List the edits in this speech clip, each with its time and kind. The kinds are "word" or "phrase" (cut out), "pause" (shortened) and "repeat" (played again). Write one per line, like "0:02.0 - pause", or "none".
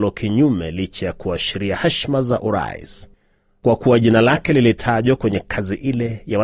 none